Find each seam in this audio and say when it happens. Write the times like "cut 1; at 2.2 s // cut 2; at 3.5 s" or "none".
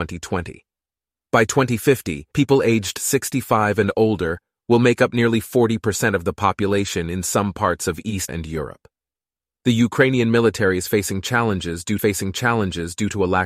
cut 1; at 2.3 s // cut 2; at 8.3 s // cut 3; at 12.0 s